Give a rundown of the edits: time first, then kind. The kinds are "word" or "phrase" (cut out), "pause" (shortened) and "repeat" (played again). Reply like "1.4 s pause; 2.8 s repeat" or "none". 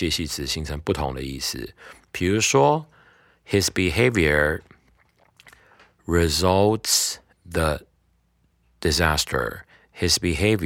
7.3 s word